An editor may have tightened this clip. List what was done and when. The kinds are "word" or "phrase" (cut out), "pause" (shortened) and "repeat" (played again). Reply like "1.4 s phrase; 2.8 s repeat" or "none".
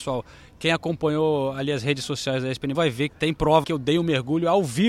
2.7 s word; 3.1 s word; 3.6 s word